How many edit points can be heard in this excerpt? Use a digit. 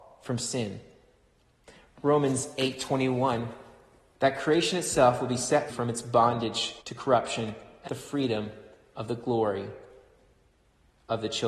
3